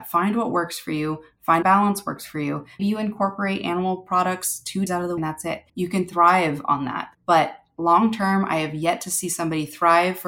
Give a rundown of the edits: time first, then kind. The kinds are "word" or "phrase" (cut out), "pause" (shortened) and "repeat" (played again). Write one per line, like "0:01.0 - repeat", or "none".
0:01.6 - word
0:02.8 - word
0:04.9 - word
0:05.2 - phrase
0:05.7 - pause
0:07.1 - pause